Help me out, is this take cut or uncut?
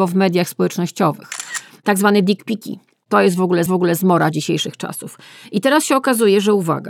cut